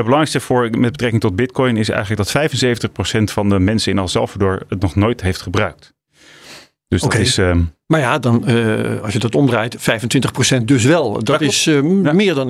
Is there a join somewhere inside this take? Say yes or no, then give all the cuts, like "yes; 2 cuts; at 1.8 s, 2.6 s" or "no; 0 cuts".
no; 0 cuts